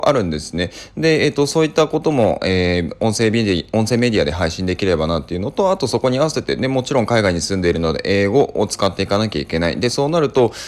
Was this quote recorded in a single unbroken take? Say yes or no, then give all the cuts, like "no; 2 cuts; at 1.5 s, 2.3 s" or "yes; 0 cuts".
yes; 0 cuts